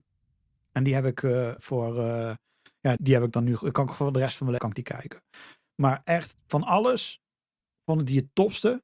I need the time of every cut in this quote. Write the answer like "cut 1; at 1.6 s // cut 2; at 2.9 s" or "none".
cut 1; at 1.6 s // cut 2; at 3.0 s // cut 3; at 4.6 s